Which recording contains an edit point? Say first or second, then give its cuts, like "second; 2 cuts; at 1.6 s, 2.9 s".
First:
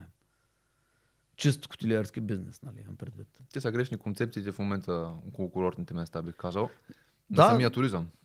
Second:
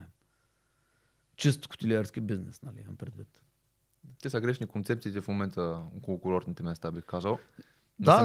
first; 1 cut; at 3.4 s